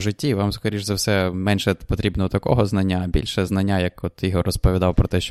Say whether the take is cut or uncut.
uncut